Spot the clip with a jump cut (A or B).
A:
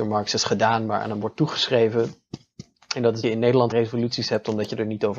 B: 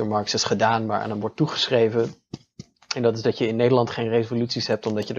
A